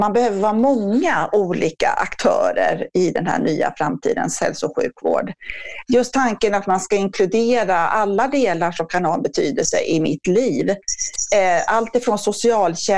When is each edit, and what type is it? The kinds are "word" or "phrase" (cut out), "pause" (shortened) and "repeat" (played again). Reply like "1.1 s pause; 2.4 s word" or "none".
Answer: none